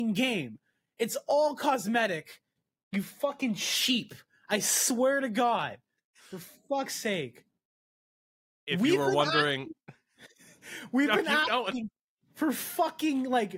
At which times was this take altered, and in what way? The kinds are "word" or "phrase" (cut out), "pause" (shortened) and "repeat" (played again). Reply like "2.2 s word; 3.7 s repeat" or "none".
6.2 s pause